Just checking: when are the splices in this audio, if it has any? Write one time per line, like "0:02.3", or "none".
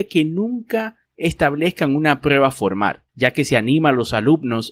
0:01.0
0:03.1